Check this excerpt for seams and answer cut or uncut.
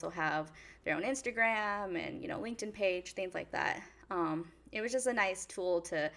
uncut